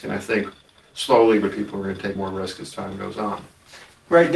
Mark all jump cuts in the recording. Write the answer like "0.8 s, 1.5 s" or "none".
1.5 s, 2.2 s